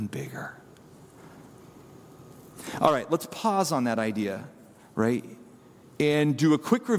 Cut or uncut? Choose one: uncut